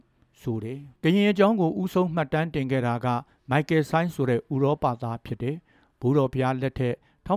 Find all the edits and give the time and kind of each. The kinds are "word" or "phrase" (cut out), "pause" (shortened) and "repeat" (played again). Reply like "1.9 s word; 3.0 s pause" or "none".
0.9 s pause

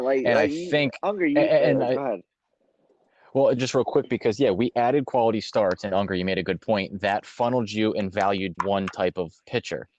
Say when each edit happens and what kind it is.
3.6 s word; 8.5 s word

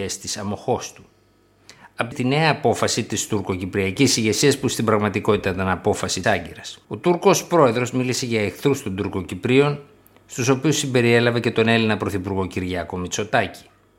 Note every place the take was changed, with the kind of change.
2.1 s phrase; 6.2 s word; 6.8 s pause

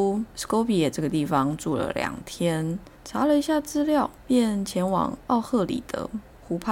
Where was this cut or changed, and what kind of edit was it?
2.9 s pause

